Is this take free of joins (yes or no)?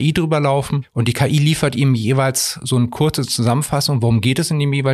yes